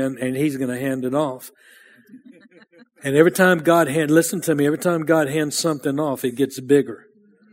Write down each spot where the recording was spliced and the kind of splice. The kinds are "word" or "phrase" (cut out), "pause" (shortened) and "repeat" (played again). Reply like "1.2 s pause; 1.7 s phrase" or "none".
none